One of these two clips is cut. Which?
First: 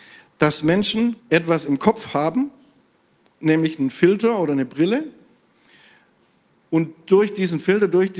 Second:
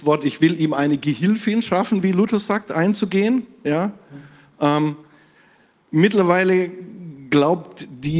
first; 1 cut; at 1.2 s

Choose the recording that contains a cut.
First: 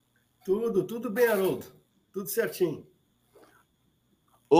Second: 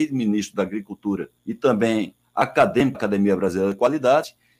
second; 2 cuts; at 1.4 s, 2.9 s

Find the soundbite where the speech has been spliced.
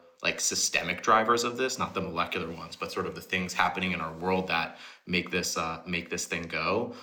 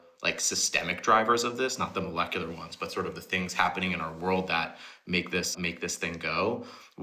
second; 1 cut; at 5.5 s

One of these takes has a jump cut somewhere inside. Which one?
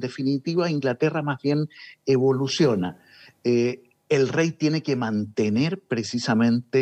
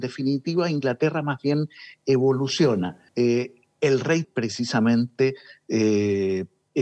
second; 2 cuts; at 3.1 s, 4.2 s

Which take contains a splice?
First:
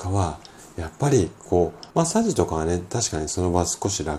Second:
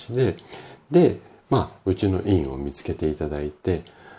first; 1 cut; at 1.9 s

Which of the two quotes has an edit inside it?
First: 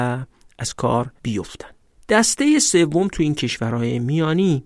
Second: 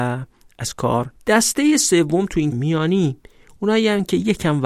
second; 2 cuts; at 1.2 s, 2.5 s

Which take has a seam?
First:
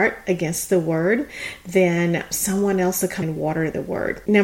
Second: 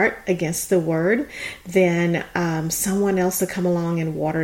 first; 2 cuts; at 2.3 s, 3.2 s

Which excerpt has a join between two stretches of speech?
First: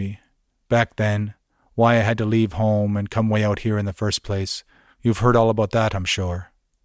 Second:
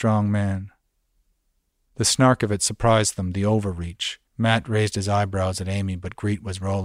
second; 1 cut; at 4.3 s

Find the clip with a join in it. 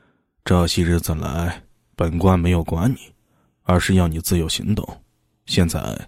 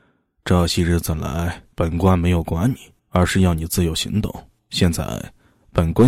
second; 3 cuts; at 1.7 s, 3.0 s, 4.6 s

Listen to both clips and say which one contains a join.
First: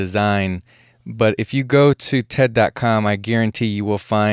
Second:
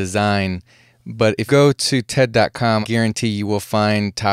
second; 2 cuts; at 1.5 s, 2.8 s

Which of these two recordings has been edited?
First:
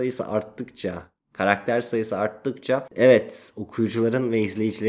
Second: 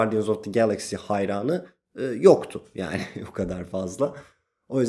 first; 1 cut; at 1.2 s

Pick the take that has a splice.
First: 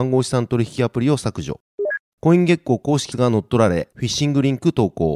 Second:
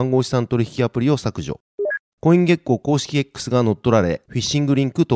first; 1 cut; at 3.1 s

